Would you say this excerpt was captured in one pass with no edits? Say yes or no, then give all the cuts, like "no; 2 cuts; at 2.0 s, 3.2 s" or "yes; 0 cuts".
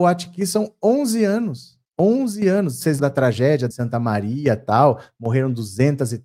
no; 3 cuts; at 1.8 s, 3.0 s, 3.7 s